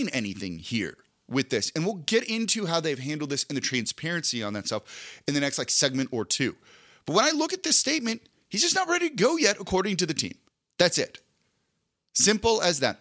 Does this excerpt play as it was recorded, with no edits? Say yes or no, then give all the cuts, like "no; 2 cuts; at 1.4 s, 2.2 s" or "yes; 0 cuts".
no; 1 cut; at 10.5 s